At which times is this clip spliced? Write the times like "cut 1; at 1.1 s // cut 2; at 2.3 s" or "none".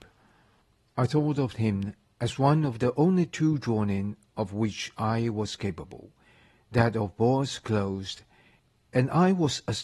none

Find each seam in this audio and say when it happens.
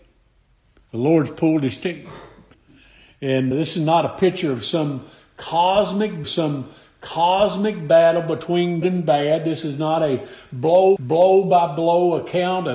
cut 1; at 2.5 s // cut 2; at 3.5 s // cut 3; at 6.2 s // cut 4; at 8.8 s // cut 5; at 11.0 s

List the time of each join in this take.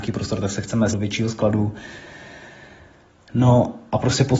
cut 1; at 0.9 s

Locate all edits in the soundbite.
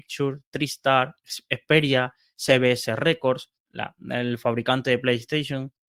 none

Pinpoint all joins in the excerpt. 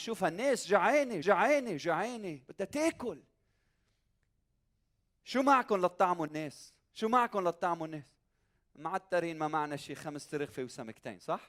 cut 1; at 1.2 s

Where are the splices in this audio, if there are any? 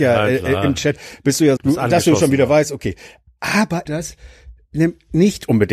cut 1; at 1.6 s // cut 2; at 3.9 s

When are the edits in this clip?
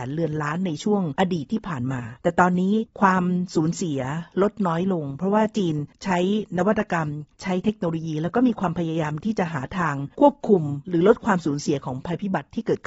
cut 1; at 2.2 s

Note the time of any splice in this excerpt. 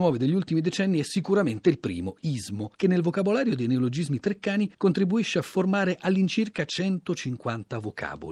cut 1; at 2.7 s // cut 2; at 4.7 s

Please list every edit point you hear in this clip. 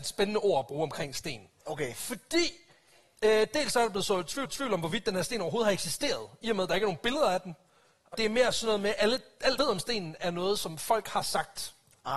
cut 1; at 4.4 s // cut 2; at 8.1 s // cut 3; at 9.6 s

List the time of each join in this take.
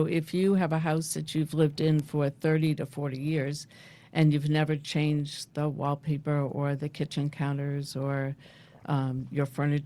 none

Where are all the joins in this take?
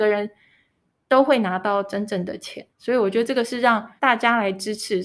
cut 1; at 2.7 s // cut 2; at 4.0 s

